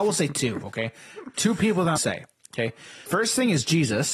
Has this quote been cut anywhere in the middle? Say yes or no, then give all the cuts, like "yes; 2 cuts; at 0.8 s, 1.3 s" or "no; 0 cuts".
yes; 3 cuts; at 1.3 s, 2.0 s, 3.1 s